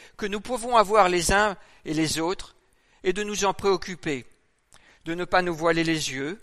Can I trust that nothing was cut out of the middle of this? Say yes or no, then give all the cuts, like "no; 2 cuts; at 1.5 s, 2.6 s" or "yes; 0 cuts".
yes; 0 cuts